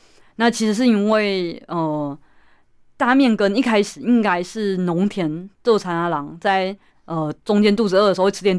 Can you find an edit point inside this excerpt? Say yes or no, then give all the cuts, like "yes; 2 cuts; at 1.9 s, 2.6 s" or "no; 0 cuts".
yes; 2 cuts; at 5.5 s, 6.9 s